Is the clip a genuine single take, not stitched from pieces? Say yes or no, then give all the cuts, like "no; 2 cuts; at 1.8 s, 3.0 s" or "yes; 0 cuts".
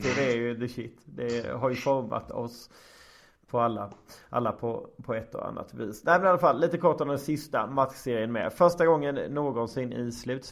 yes; 0 cuts